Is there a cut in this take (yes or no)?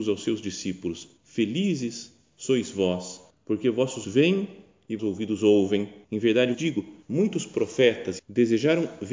yes